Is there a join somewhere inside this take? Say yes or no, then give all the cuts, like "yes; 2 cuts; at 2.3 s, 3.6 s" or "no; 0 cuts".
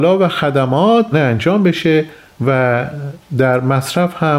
yes; 1 cut; at 1.1 s